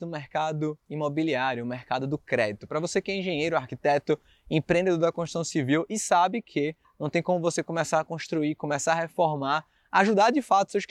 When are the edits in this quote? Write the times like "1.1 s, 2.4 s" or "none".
none